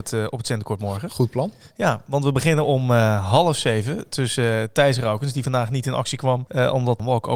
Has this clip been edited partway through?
no; 0 cuts

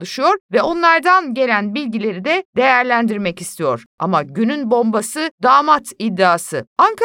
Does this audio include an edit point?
no; 0 cuts

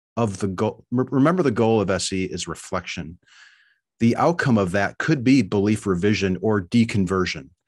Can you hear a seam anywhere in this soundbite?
no; 0 cuts

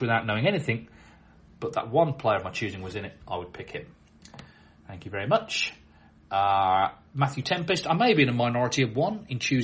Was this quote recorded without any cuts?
yes; 0 cuts

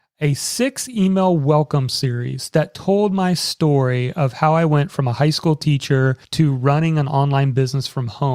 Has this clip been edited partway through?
yes; 1 cut; at 6.2 s

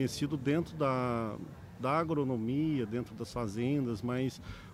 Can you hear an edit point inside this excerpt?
no; 0 cuts

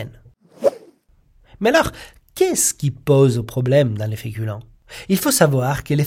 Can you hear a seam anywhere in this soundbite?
no; 0 cuts

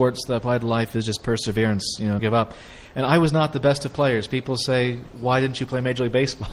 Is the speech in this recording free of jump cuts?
no; 1 cut; at 2.2 s

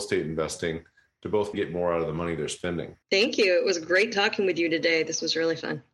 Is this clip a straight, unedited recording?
no; 2 cuts; at 1.5 s, 3.0 s

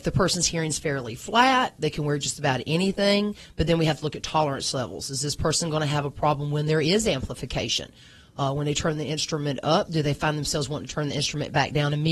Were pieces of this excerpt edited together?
no; 0 cuts

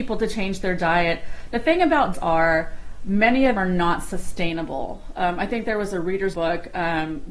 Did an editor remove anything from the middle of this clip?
yes; 3 cuts; at 2.1 s, 3.6 s, 6.3 s

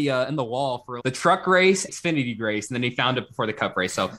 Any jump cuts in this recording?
yes; 2 cuts; at 1.0 s, 1.9 s

